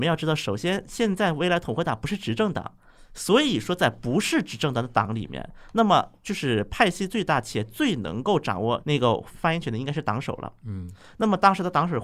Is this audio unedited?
yes; 0 cuts

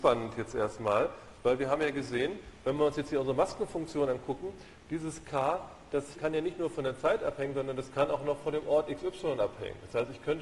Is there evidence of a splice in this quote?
yes; 1 cut; at 6.1 s

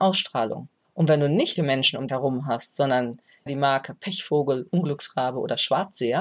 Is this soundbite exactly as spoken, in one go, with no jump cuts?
no; 3 cuts; at 1.6 s, 2.1 s, 3.5 s

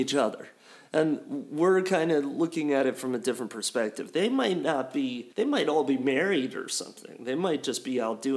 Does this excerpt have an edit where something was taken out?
yes; 1 cut; at 5.3 s

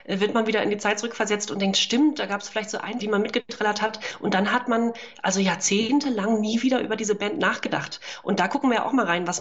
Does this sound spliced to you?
yes; 1 cut; at 3.0 s

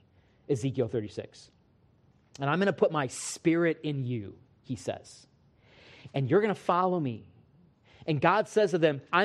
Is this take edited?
no; 0 cuts

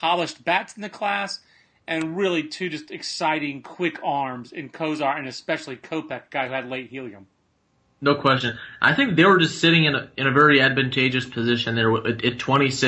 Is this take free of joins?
yes; 0 cuts

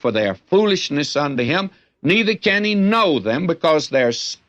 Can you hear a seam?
no; 0 cuts

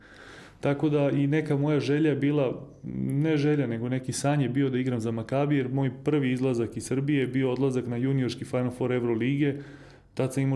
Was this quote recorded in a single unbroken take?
yes; 0 cuts

